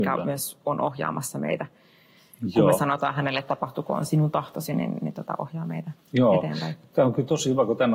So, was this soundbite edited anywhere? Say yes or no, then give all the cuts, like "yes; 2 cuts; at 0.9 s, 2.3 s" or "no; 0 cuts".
no; 0 cuts